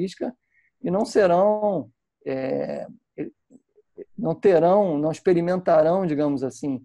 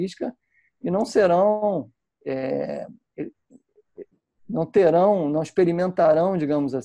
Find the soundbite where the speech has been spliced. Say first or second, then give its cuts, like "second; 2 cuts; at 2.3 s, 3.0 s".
first; 1 cut; at 4.1 s